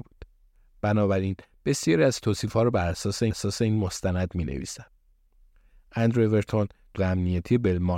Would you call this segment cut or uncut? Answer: cut